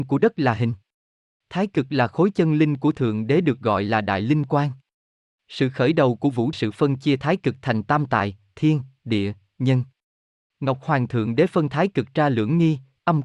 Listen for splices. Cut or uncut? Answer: cut